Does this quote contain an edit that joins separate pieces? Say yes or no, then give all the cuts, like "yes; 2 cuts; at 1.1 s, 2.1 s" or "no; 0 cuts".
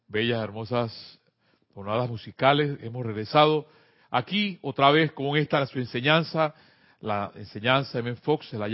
no; 0 cuts